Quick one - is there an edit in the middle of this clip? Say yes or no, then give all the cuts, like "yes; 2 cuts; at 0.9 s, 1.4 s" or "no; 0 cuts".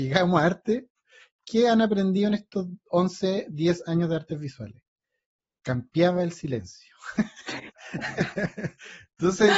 no; 0 cuts